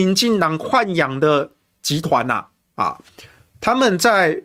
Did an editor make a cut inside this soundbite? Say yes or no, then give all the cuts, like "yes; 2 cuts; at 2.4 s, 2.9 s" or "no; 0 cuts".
no; 0 cuts